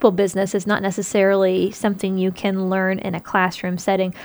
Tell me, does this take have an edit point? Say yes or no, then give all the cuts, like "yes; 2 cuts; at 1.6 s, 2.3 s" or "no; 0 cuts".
no; 0 cuts